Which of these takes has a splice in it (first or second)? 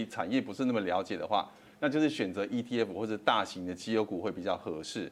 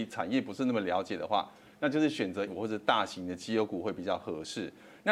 second